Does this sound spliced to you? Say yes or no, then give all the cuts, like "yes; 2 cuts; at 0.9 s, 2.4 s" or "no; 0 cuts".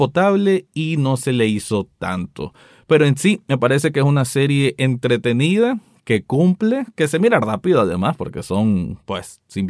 no; 0 cuts